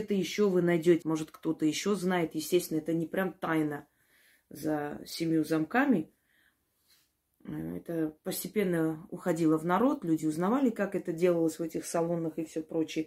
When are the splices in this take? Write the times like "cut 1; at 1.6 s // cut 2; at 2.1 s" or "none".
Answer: cut 1; at 1.0 s